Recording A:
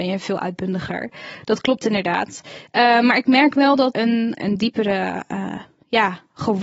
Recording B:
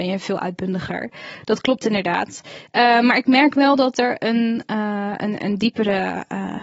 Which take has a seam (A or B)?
A